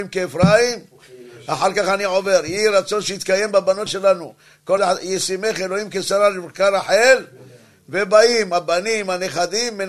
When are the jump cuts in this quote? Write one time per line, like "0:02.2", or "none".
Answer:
0:03.9
0:04.8